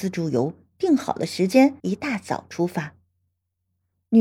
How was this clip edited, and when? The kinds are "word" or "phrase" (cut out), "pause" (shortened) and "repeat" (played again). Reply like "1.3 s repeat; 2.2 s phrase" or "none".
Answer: 1.8 s pause